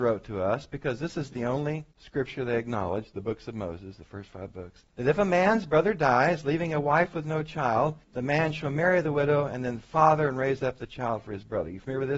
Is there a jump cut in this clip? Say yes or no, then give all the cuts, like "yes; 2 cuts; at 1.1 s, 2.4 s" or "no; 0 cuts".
yes; 3 cuts; at 1.9 s, 4.9 s, 8.0 s